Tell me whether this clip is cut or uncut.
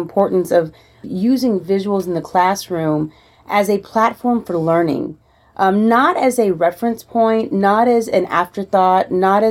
uncut